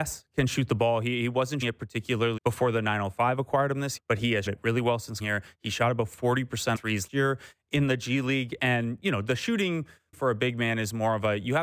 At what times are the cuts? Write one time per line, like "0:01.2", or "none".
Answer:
0:01.6
0:02.4
0:04.0
0:04.5
0:05.2
0:06.7
0:07.1
0:10.1